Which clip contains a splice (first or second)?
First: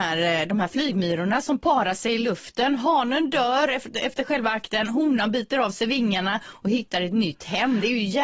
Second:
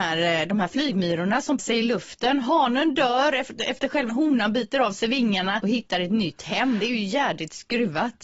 second